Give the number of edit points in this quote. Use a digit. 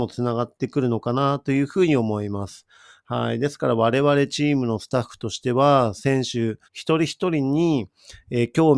1